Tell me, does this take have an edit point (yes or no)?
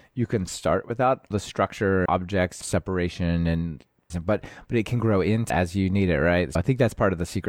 yes